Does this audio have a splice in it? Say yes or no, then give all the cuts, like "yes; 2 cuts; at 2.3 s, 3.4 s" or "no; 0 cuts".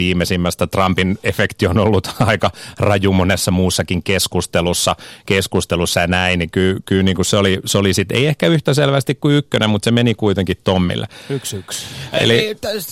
no; 0 cuts